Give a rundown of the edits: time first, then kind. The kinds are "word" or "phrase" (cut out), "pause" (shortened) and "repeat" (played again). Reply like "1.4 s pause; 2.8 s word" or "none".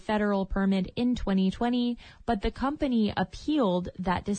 none

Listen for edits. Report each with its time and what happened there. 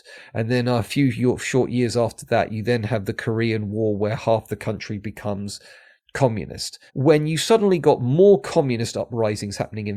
6.9 s pause

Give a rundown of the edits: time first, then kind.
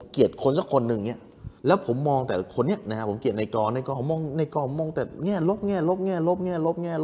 1.6 s pause

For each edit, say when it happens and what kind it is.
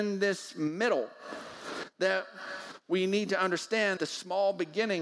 4.0 s word

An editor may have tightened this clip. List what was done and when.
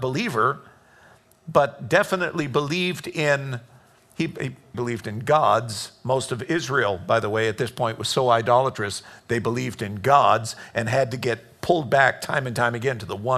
4.7 s word

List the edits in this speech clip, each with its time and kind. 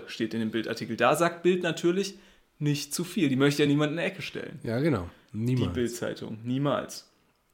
none

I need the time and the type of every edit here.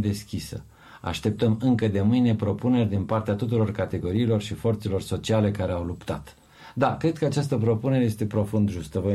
none

